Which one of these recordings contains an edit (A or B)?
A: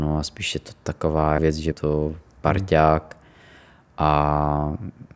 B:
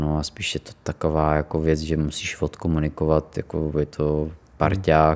A